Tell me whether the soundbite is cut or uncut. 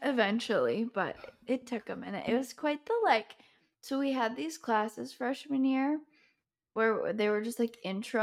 uncut